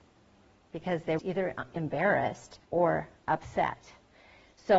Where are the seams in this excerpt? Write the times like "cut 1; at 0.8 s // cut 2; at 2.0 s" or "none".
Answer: cut 1; at 1.2 s // cut 2; at 2.6 s